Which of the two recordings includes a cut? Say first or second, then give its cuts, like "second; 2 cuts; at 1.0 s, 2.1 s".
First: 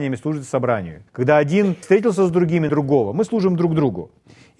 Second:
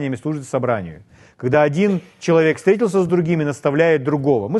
first; 3 cuts; at 1.1 s, 1.8 s, 2.7 s